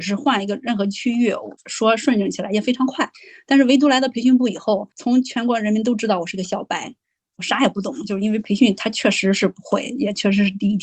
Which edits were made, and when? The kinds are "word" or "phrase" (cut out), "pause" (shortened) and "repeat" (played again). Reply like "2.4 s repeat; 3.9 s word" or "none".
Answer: 4.9 s pause